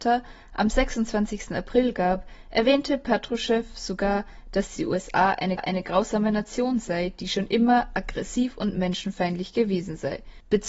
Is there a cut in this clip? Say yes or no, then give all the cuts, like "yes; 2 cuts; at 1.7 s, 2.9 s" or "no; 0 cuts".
yes; 1 cut; at 5.6 s